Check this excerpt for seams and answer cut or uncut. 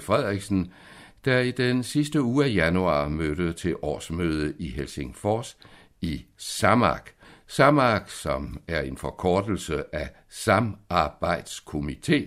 uncut